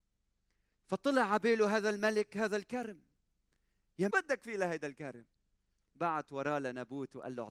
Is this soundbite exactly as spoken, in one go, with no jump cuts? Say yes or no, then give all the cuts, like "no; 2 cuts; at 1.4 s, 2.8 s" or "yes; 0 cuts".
no; 1 cut; at 4.1 s